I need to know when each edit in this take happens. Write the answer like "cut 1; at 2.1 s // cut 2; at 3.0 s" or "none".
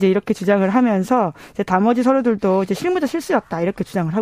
none